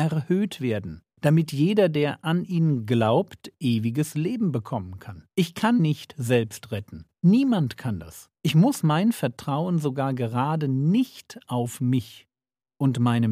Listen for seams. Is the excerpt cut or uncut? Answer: cut